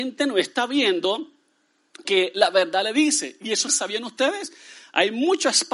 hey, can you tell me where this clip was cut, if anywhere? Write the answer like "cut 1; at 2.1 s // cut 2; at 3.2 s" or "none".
cut 1; at 2.0 s // cut 2; at 3.7 s